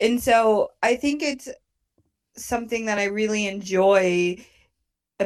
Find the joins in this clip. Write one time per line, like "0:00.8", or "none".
none